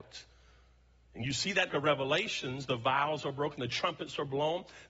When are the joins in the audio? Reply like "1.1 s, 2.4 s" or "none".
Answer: 1.7 s